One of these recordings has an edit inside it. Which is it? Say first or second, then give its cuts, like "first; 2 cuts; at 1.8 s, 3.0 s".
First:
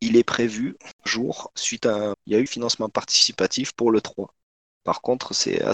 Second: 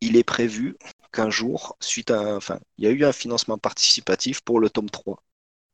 first; 4 cuts; at 1.1 s, 2.1 s, 2.5 s, 4.0 s